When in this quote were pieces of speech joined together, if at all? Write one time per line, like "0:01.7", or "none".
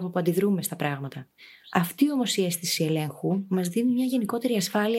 none